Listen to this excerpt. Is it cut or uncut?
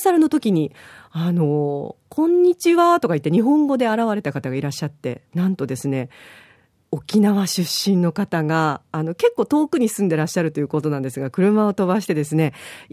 uncut